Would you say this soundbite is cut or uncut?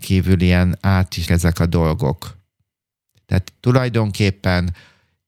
cut